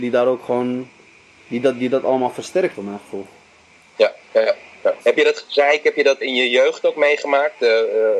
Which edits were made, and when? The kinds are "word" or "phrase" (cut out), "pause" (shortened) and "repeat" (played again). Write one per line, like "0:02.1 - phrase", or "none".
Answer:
0:02.7 - word
0:05.0 - pause
0:06.2 - word